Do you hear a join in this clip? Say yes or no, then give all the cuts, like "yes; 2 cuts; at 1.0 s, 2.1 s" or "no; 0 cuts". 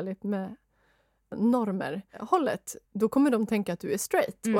yes; 1 cut; at 2.9 s